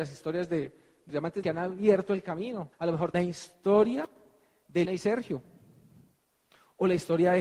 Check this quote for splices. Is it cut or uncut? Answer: cut